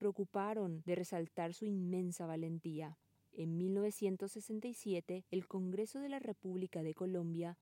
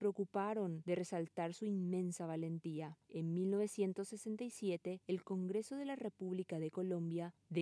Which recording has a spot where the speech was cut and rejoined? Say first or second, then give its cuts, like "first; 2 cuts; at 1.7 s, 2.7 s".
second; 1 cut; at 3.0 s